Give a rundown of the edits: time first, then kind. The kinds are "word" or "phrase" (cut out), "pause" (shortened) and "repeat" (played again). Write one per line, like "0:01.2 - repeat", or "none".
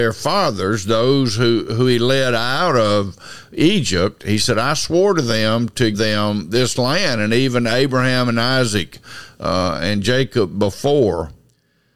0:05.9 - word